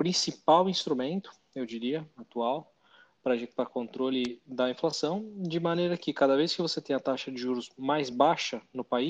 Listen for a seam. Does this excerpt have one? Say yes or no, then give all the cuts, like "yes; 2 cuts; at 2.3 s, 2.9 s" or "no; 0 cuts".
no; 0 cuts